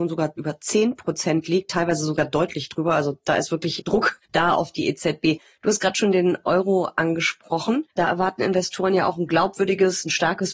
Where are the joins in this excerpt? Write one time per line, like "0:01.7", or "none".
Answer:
0:04.2
0:07.9

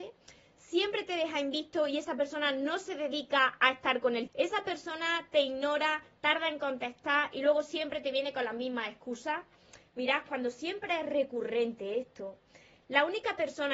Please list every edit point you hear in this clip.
0:04.3

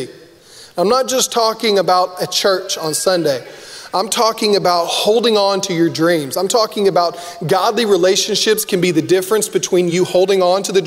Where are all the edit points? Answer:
none

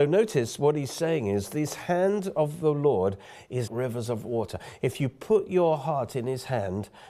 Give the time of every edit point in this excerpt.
0:03.7

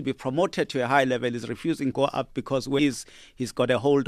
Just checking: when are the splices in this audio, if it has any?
0:01.9
0:02.8

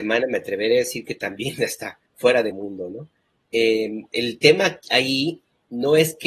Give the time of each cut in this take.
0:02.1
0:02.5

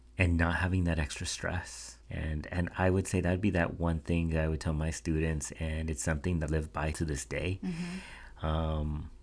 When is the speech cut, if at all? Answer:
0:02.0
0:06.5
0:06.9

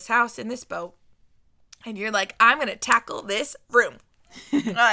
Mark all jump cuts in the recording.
none

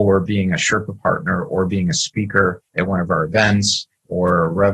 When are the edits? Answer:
0:02.7

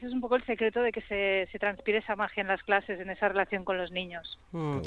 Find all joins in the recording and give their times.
none

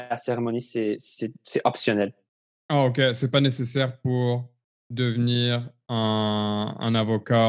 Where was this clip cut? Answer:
none

